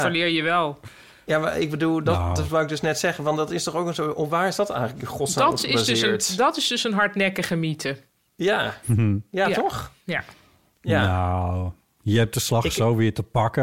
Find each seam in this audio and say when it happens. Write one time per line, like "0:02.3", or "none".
0:10.0

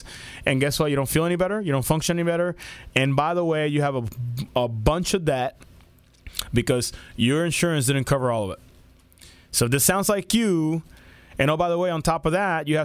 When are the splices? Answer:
none

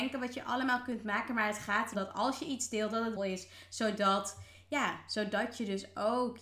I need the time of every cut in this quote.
0:01.9
0:03.2

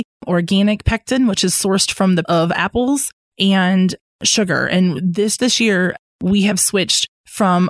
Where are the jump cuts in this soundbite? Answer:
0:02.2
0:05.4

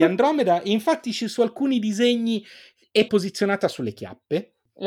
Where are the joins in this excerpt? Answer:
0:03.1

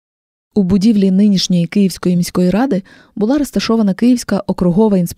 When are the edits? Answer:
none

